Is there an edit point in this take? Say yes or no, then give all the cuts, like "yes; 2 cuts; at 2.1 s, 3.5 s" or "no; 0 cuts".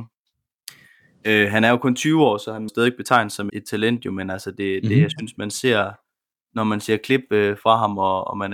yes; 2 cuts; at 2.7 s, 3.5 s